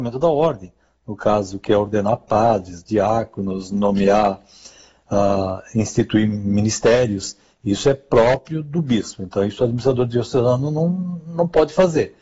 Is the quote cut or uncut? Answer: uncut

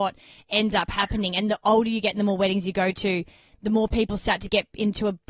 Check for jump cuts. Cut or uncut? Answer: uncut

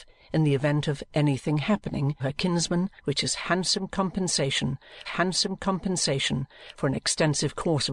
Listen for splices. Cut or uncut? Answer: cut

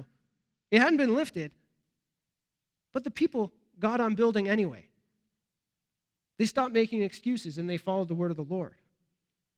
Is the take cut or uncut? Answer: uncut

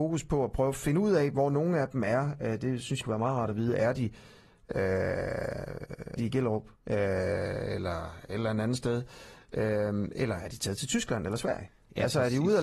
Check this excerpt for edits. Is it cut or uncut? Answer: cut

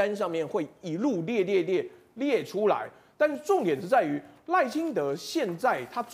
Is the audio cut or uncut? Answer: uncut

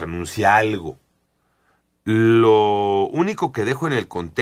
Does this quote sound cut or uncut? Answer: uncut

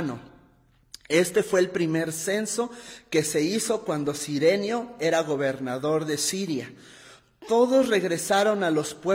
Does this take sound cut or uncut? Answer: uncut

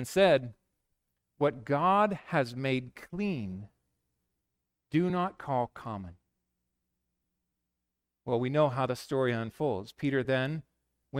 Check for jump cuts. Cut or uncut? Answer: uncut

